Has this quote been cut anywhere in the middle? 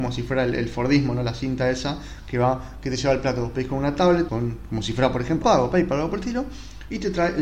yes; 2 cuts; at 4.3 s, 5.4 s

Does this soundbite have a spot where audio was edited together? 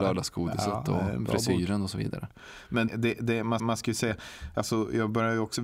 yes; 2 cuts; at 2.9 s, 3.6 s

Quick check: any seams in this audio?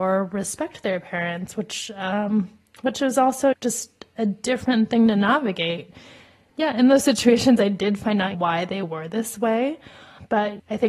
no; 0 cuts

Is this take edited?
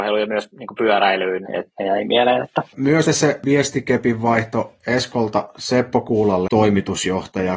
yes; 3 cuts; at 1.5 s, 3.1 s, 6.5 s

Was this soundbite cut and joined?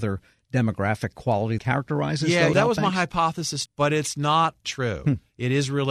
yes; 4 cuts; at 1.6 s, 2.5 s, 3.7 s, 4.6 s

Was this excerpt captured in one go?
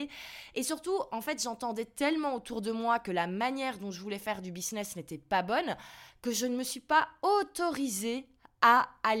yes; 0 cuts

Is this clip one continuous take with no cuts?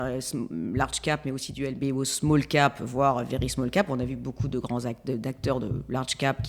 yes; 0 cuts

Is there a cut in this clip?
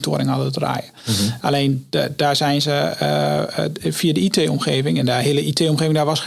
no; 0 cuts

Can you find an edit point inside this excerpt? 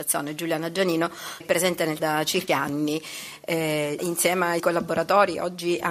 yes; 5 cuts; at 1.4 s, 2.0 s, 2.5 s, 4.0 s, 4.6 s

